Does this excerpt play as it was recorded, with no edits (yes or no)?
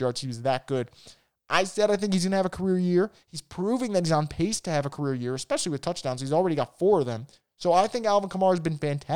yes